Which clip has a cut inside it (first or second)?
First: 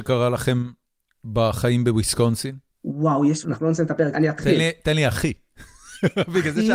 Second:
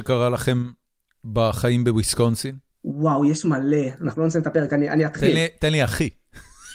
first